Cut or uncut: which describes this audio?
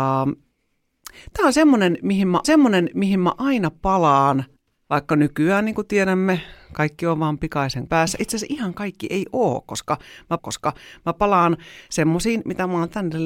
cut